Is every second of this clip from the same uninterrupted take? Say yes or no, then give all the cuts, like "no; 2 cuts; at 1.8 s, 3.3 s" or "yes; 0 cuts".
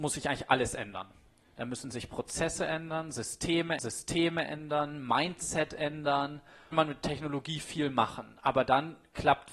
no; 2 cuts; at 3.8 s, 6.7 s